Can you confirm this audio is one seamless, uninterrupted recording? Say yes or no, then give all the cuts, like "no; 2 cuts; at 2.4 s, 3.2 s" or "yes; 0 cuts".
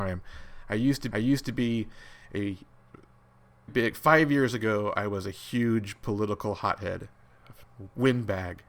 no; 2 cuts; at 1.1 s, 3.7 s